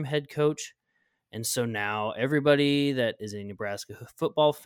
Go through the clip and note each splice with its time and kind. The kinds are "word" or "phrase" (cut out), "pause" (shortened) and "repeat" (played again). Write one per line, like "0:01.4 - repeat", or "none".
none

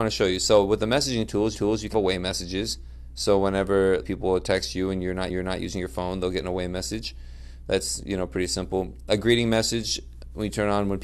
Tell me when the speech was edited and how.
0:01.5 - repeat
0:01.9 - word
0:04.0 - word
0:05.3 - repeat

